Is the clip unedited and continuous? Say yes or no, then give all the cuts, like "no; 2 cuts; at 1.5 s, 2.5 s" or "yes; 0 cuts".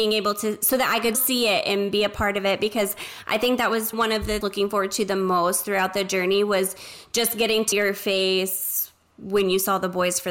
no; 4 cuts; at 1.1 s, 3.9 s, 4.4 s, 7.7 s